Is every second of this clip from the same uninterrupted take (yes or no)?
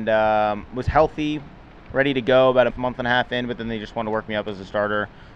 no